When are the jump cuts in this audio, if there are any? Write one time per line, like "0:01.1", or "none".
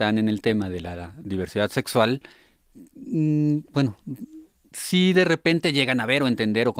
none